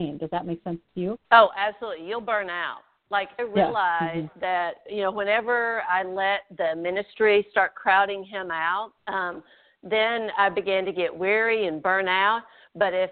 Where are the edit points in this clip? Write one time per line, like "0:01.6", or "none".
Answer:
0:01.2
0:03.4
0:09.0